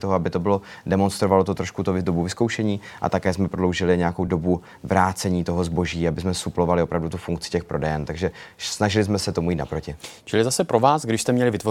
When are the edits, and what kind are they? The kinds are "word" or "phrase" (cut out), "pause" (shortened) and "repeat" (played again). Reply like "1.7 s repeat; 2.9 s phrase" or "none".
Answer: none